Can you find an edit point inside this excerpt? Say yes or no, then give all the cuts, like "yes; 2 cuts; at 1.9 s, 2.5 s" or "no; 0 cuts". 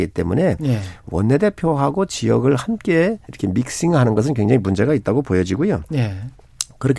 yes; 1 cut; at 3.2 s